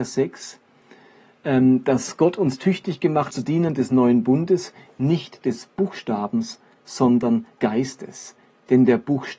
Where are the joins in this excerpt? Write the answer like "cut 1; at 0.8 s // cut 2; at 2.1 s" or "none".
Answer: cut 1; at 3.3 s // cut 2; at 7.6 s